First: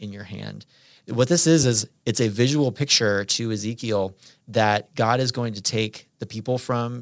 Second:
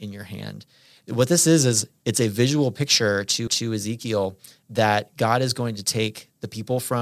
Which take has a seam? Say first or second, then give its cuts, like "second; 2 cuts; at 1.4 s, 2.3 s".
second; 1 cut; at 3.5 s